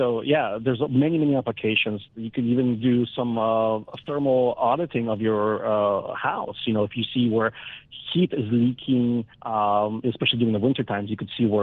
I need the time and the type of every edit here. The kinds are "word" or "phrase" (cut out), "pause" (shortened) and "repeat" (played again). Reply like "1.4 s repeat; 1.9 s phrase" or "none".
9.3 s pause

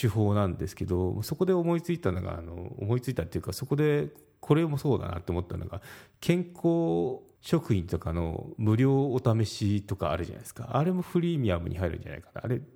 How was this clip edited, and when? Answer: 7.4 s pause

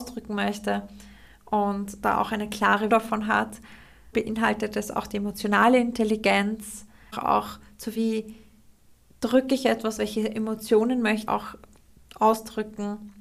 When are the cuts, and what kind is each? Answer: 2.9 s word; 4.1 s word; 7.1 s word; 7.9 s word; 10.0 s word; 11.3 s word

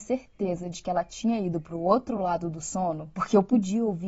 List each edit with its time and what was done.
none

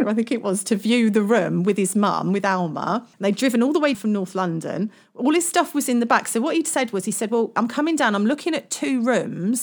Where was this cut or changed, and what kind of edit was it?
3.1 s pause; 3.9 s word

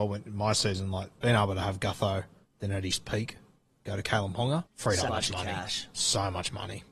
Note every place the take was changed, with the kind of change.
4.7 s pause; 5.1 s word

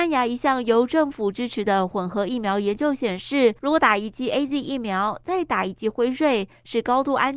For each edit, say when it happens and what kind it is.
3.6 s pause

